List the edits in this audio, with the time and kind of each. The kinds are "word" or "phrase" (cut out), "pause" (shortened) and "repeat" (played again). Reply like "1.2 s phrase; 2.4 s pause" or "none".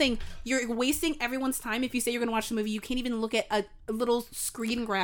none